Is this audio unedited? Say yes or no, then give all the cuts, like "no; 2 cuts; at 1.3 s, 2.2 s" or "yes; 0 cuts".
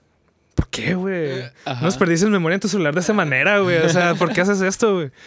yes; 0 cuts